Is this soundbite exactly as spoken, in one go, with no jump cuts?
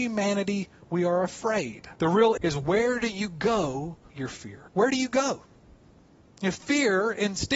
no; 4 cuts; at 2.0 s, 2.4 s, 4.1 s, 4.7 s

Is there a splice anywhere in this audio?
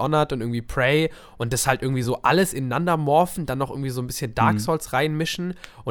no; 0 cuts

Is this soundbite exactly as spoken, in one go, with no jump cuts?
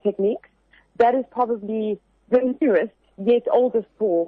yes; 0 cuts

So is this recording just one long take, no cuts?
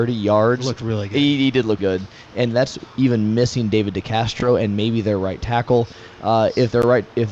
no; 1 cut; at 1.8 s

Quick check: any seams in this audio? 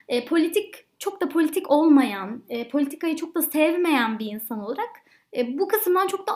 no; 0 cuts

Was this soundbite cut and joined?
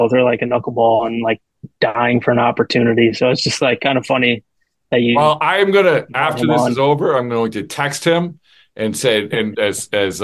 no; 0 cuts

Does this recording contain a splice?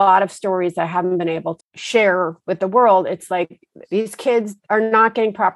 yes; 4 cuts; at 1.6 s, 2.4 s, 3.8 s, 4.6 s

